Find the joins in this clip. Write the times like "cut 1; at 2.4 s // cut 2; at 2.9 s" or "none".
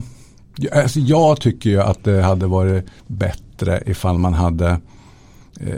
cut 1; at 3.0 s

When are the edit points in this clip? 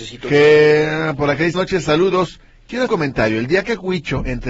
cut 1; at 1.5 s // cut 2; at 2.9 s

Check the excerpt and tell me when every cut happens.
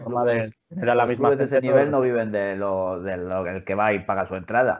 none

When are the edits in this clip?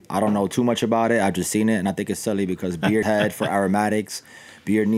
cut 1; at 3.0 s

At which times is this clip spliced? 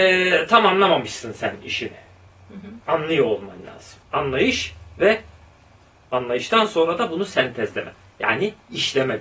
cut 1; at 4.0 s

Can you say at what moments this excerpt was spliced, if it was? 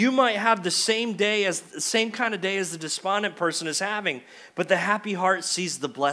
none

